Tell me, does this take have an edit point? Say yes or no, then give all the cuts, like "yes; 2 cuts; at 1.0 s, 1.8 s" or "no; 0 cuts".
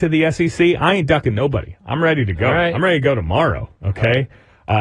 no; 0 cuts